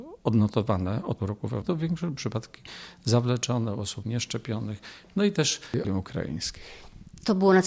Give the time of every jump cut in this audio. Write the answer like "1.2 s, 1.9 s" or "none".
1.2 s, 1.6 s, 2.2 s, 4.0 s, 5.8 s